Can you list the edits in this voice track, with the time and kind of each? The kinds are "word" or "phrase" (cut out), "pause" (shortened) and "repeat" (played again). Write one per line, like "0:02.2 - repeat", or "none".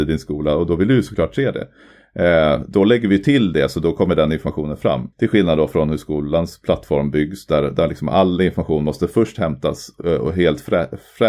0:05.1 - pause